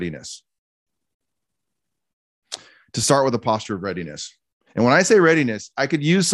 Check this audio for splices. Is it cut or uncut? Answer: uncut